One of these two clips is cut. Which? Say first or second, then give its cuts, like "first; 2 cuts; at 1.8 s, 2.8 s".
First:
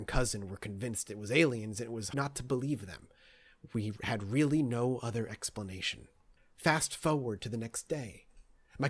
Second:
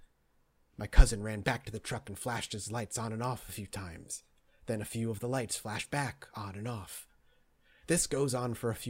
first; 2 cuts; at 2.1 s, 6.4 s